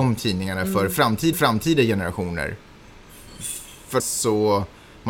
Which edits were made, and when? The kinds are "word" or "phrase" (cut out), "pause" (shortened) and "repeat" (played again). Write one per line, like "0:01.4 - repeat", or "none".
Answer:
0:01.3 - repeat
0:04.0 - word